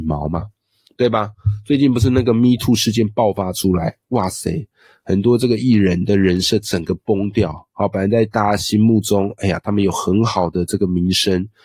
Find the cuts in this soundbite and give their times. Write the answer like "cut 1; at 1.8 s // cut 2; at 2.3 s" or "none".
none